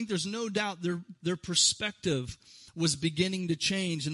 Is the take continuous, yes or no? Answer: yes